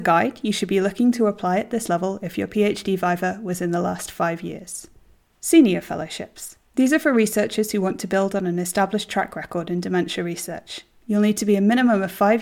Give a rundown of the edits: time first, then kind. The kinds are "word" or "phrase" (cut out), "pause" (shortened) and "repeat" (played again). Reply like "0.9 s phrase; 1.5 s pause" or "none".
5.0 s pause; 6.6 s pause

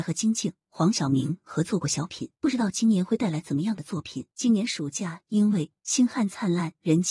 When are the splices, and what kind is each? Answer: 2.4 s pause; 4.3 s pause

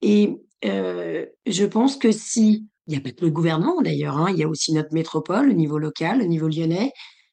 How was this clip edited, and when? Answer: 2.8 s pause

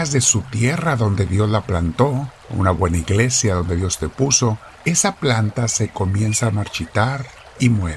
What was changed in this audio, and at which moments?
2.4 s pause; 4.7 s pause

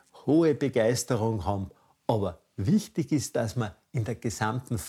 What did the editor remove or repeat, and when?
none

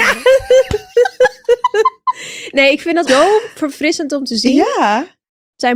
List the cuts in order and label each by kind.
0.9 s pause; 3.1 s word

